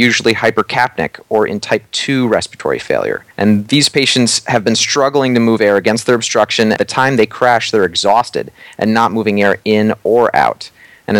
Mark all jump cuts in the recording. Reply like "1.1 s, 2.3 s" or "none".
3.3 s, 6.8 s